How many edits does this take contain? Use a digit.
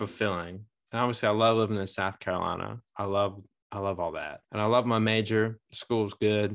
1